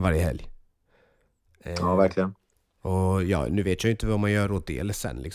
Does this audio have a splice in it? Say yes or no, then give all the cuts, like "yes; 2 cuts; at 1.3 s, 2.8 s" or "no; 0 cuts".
no; 0 cuts